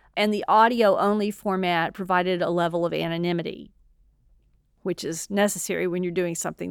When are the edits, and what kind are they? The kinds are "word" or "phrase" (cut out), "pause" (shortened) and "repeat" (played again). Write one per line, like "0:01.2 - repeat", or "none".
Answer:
none